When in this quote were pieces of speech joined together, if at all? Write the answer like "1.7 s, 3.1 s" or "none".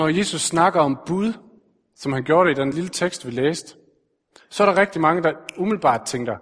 none